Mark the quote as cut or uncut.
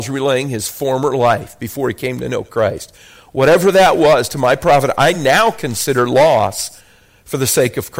uncut